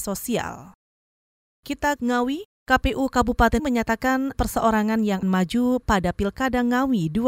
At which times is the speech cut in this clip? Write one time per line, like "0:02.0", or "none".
0:02.0
0:03.6
0:04.3
0:05.2